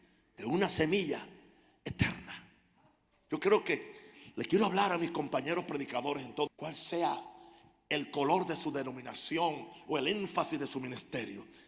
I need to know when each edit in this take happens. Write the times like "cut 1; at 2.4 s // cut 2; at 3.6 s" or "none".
cut 1; at 6.5 s